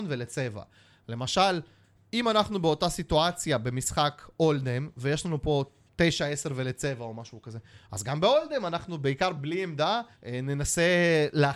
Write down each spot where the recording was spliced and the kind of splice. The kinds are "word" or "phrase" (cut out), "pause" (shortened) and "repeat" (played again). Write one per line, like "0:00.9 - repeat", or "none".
0:05.9 - pause
0:10.1 - pause